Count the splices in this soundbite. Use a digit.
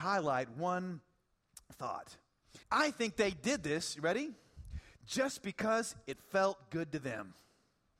1